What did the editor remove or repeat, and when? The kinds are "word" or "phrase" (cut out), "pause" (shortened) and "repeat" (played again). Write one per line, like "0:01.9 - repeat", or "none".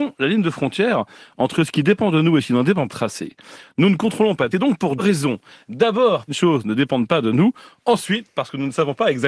0:02.9 - phrase
0:04.5 - phrase
0:05.0 - word
0:06.3 - phrase